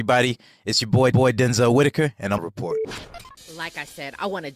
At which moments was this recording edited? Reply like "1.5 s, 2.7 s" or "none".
1.1 s, 2.4 s, 3.4 s